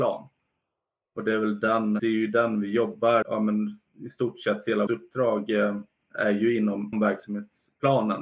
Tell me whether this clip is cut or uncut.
cut